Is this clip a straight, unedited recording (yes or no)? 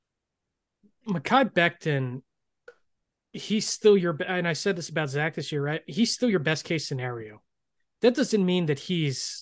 yes